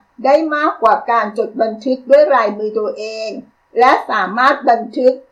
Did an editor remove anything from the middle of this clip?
yes; 1 cut; at 3.5 s

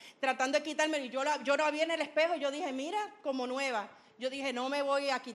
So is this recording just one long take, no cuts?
yes; 0 cuts

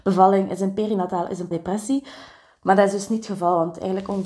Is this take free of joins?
no; 1 cut; at 1.5 s

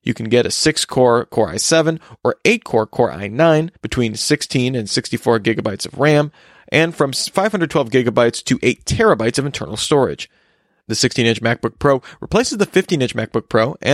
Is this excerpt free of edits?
no; 1 cut; at 3.7 s

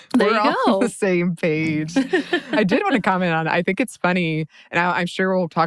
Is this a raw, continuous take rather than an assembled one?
yes; 0 cuts

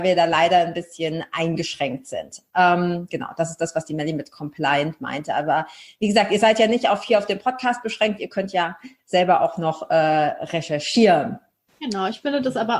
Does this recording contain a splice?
no; 0 cuts

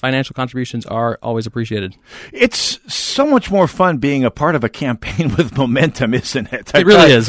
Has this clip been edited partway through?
no; 0 cuts

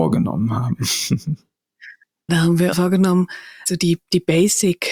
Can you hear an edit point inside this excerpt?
yes; 3 cuts; at 2.3 s, 2.7 s, 3.7 s

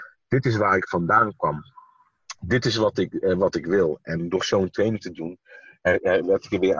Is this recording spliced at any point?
no; 0 cuts

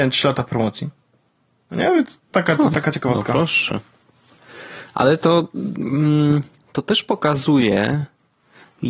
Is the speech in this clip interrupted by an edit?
no; 0 cuts

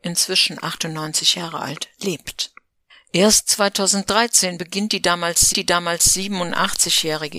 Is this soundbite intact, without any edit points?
no; 1 cut; at 5.5 s

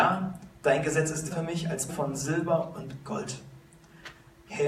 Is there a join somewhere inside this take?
yes; 2 cuts; at 1.3 s, 1.9 s

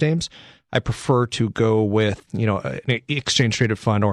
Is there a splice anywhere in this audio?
yes; 1 cut; at 2.3 s

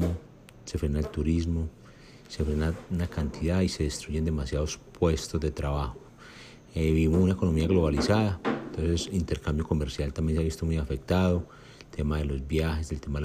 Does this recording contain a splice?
no; 0 cuts

